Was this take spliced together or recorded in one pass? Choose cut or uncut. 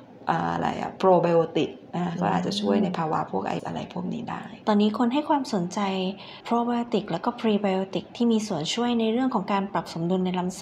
cut